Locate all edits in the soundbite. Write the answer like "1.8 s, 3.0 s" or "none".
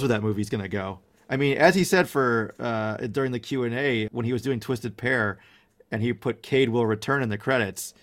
4.1 s